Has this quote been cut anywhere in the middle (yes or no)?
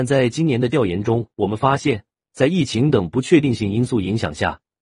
yes